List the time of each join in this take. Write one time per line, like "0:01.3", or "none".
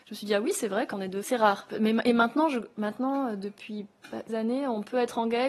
0:00.9
0:01.2
0:04.3